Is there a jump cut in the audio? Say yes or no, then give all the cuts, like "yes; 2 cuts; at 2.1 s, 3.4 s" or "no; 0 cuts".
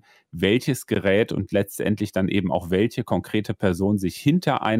no; 0 cuts